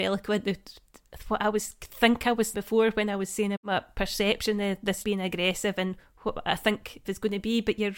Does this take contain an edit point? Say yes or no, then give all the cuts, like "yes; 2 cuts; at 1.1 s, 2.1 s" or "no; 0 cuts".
yes; 4 cuts; at 2.5 s, 3.5 s, 5.0 s, 7.0 s